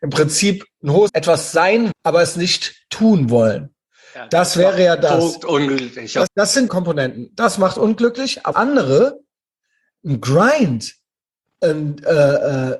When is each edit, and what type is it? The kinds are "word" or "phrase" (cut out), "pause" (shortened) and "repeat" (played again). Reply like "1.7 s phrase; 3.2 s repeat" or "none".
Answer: 1.1 s word; 1.9 s word; 6.3 s word; 6.7 s phrase; 8.5 s word

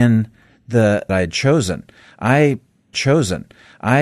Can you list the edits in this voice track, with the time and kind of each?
1.1 s phrase; 2.9 s repeat

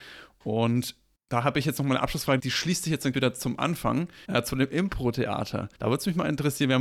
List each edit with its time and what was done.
1.2 s pause; 2.4 s word; 3.1 s word; 4.2 s pause; 5.7 s pause

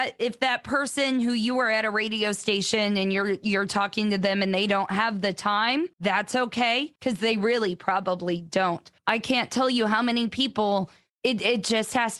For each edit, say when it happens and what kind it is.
5.9 s pause; 7.0 s pause; 9.0 s pause; 11.1 s pause

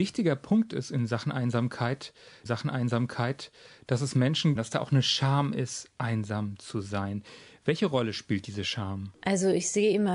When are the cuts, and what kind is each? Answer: 2.5 s repeat; 4.6 s phrase

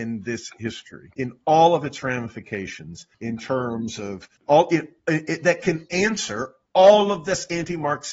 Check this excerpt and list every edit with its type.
1.1 s pause; 3.1 s pause; 4.4 s pause

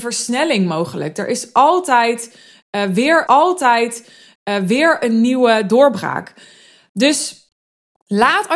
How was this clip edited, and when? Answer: 3.3 s repeat

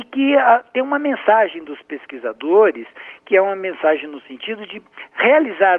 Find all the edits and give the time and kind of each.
none

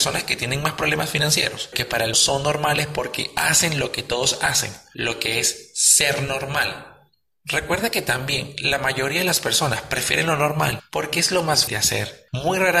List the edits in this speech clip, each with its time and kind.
1.7 s word; 2.1 s word; 11.7 s word

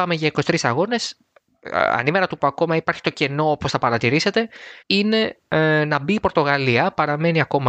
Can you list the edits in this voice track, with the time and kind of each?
2.4 s word; 4.8 s pause

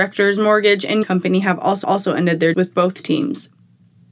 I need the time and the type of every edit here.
1.0 s phrase; 1.8 s repeat; 2.5 s word

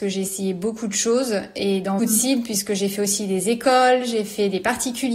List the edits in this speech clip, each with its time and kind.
2.0 s word

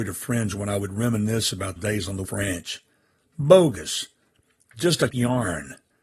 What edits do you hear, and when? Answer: 1.8 s word; 2.2 s word; 5.1 s word

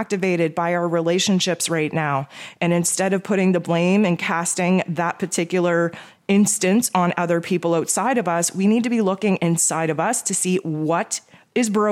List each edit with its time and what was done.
none

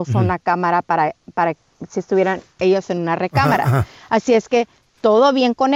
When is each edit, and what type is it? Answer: none

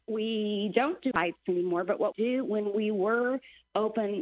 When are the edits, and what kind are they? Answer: 1.1 s word; 2.1 s word

